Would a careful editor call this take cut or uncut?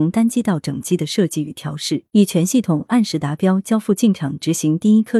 cut